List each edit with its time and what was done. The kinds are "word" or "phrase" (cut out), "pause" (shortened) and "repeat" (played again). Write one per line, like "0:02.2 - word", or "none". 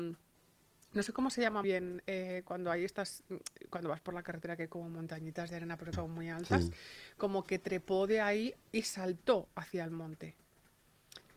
0:01.6 - word
0:05.9 - phrase
0:08.6 - pause